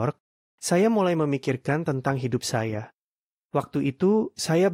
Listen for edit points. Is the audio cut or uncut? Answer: uncut